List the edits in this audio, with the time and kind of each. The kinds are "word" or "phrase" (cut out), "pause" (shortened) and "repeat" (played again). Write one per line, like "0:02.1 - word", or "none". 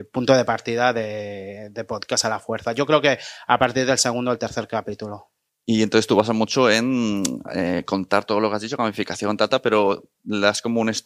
0:05.5 - pause